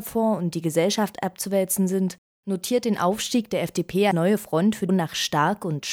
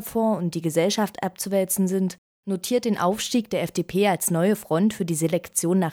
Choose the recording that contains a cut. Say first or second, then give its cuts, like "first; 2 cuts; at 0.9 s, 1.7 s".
first; 2 cuts; at 4.1 s, 4.9 s